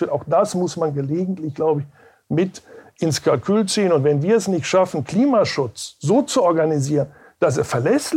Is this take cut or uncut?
uncut